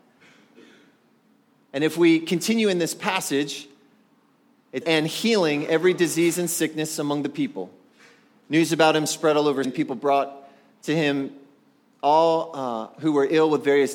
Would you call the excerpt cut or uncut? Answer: cut